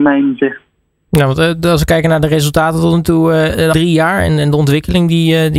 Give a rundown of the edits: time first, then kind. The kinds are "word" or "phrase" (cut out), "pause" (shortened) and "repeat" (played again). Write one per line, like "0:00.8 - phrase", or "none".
0:03.7 - word